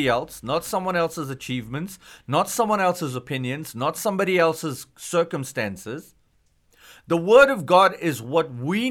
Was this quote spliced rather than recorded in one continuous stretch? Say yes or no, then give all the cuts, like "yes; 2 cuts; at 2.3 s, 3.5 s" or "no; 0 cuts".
no; 0 cuts